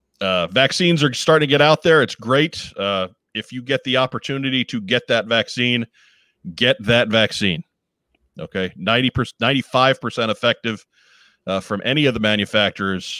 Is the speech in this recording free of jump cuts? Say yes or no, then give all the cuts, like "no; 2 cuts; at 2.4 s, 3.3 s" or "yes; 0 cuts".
yes; 0 cuts